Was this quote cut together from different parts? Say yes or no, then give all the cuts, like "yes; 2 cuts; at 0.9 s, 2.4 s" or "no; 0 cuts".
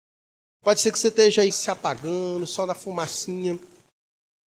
yes; 1 cut; at 1.5 s